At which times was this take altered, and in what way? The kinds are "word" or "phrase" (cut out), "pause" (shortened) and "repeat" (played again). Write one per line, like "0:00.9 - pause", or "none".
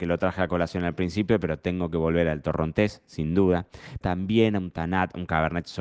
0:04.0 - word